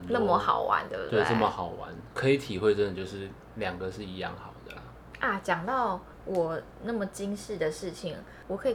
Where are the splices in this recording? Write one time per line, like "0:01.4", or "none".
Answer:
0:02.1